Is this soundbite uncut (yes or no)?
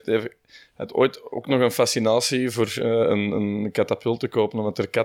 yes